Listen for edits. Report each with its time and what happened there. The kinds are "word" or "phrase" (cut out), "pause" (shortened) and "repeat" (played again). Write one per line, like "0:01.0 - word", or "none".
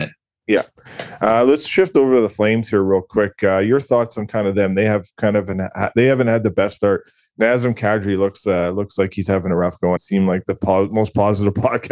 0:10.0 - phrase